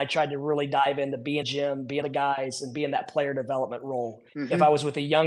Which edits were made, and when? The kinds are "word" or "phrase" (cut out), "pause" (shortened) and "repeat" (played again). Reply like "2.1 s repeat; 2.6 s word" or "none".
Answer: 1.4 s phrase; 2.0 s word; 4.3 s pause